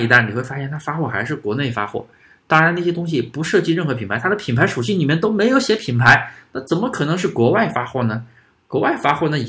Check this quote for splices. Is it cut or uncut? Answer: uncut